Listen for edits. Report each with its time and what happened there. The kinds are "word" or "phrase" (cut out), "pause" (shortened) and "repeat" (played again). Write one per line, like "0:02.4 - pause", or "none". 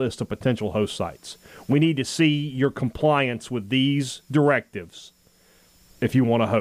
none